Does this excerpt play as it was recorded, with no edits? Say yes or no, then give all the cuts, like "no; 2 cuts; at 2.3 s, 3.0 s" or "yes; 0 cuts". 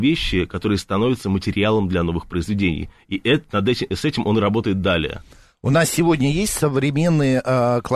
yes; 0 cuts